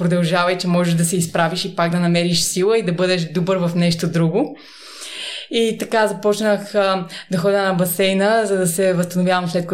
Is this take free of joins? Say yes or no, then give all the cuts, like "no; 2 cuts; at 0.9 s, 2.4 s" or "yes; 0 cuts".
yes; 0 cuts